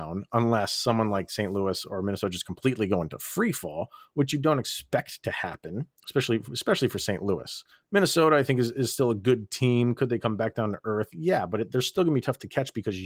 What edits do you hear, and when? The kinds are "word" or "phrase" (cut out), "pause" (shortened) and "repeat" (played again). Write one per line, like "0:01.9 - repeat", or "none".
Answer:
0:05.9 - pause
0:07.7 - pause